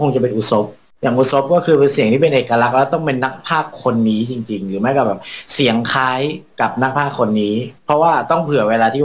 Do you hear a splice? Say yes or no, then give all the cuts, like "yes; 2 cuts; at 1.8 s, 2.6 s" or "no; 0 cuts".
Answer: yes; 1 cut; at 7.8 s